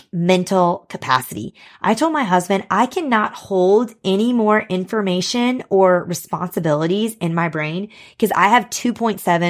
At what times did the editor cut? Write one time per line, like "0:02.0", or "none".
none